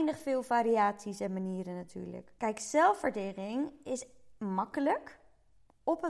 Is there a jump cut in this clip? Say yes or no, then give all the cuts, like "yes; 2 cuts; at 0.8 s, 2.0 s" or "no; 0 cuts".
yes; 1 cut; at 2.4 s